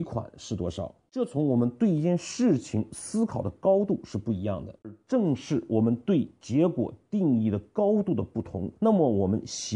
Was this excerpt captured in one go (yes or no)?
no